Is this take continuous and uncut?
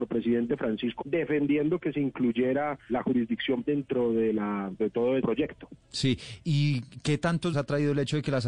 no; 7 cuts; at 1.0 s, 2.9 s, 3.7 s, 4.8 s, 5.2 s, 6.4 s, 7.5 s

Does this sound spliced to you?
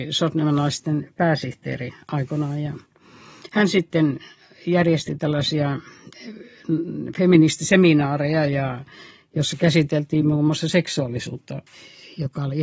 no; 0 cuts

